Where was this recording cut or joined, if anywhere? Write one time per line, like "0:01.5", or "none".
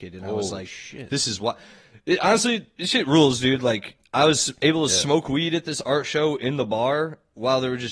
none